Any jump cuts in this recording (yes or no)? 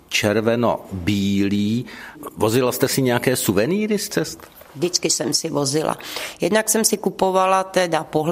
yes